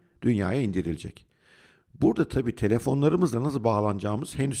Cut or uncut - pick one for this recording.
cut